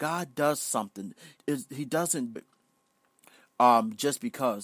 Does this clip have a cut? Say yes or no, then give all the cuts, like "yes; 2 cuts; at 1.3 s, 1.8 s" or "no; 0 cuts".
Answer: yes; 2 cuts; at 1.4 s, 2.4 s